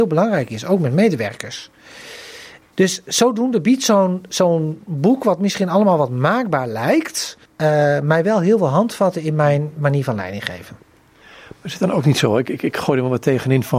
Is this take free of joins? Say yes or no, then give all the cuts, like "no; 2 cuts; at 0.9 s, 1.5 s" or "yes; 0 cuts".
no; 1 cut; at 7.5 s